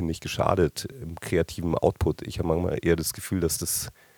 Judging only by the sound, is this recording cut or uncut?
cut